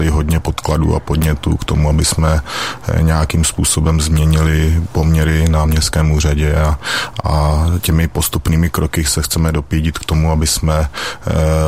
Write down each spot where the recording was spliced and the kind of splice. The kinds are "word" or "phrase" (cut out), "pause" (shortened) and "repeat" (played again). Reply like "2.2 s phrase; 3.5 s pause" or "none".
none